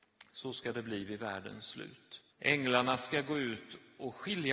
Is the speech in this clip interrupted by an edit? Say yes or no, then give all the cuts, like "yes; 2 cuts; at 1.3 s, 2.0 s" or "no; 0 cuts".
yes; 1 cut; at 2.3 s